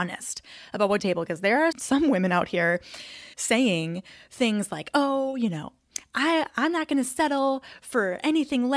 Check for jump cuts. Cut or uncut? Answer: cut